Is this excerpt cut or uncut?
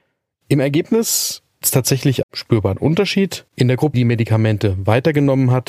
cut